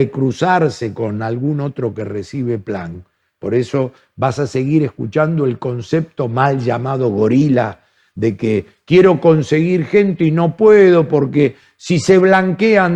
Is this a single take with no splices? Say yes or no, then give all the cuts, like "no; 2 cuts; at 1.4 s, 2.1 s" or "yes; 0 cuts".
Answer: yes; 0 cuts